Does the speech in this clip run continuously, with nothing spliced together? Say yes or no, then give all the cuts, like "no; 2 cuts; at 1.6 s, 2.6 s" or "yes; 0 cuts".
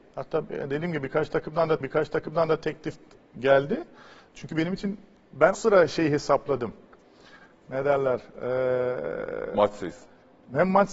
no; 2 cuts; at 1.8 s, 5.5 s